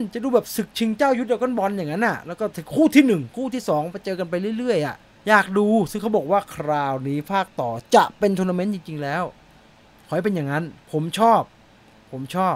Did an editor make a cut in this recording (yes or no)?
yes